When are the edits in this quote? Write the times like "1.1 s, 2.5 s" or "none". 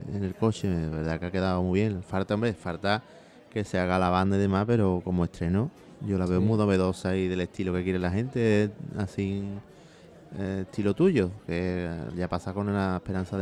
none